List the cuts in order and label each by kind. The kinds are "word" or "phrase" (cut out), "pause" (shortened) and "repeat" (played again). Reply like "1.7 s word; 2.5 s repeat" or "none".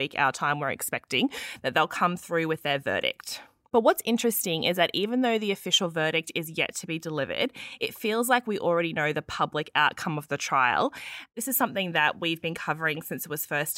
none